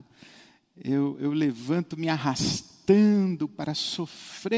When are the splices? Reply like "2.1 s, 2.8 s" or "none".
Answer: none